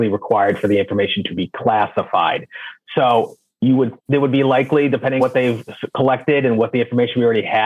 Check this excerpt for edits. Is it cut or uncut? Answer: cut